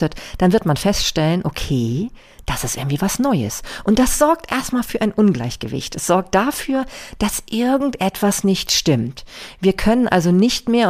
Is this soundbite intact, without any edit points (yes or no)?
yes